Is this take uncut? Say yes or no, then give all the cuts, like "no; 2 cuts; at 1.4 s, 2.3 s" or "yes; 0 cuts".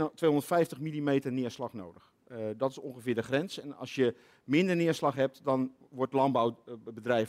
yes; 0 cuts